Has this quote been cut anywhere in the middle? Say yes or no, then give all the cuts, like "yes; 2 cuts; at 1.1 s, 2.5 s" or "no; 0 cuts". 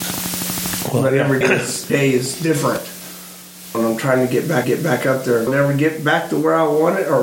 yes; 5 cuts; at 1.4 s, 1.9 s, 3.7 s, 4.6 s, 5.5 s